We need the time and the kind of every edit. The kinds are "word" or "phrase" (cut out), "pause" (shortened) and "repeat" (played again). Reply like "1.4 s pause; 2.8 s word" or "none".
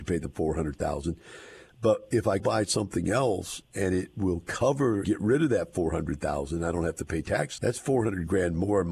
2.4 s phrase; 5.0 s word; 7.6 s word